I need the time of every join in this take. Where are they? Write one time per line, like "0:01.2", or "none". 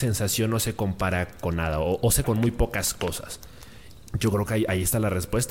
0:02.2